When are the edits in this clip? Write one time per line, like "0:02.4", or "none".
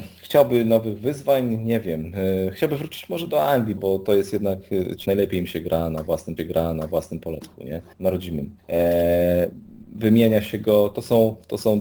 0:03.8
0:05.0
0:06.4
0:07.9
0:08.6